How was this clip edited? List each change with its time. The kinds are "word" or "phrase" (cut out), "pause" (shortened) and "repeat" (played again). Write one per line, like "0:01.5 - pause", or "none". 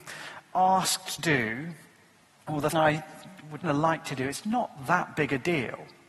0:01.2 - word
0:02.7 - word
0:03.6 - word
0:04.4 - word